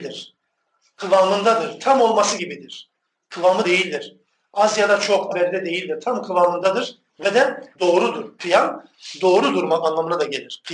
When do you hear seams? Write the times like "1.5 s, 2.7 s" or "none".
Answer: 2.4 s, 3.6 s, 5.3 s, 7.1 s, 7.7 s